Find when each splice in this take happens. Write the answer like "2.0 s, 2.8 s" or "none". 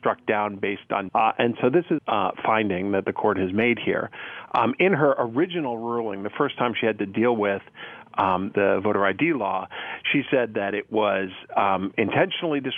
1.1 s, 2.0 s, 8.5 s